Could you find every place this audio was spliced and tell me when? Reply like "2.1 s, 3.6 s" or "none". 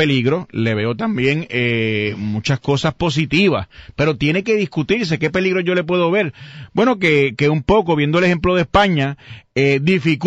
none